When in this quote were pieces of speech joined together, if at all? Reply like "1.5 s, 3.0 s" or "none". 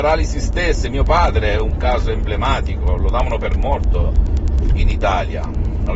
none